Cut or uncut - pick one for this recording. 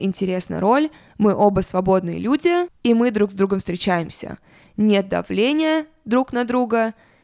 uncut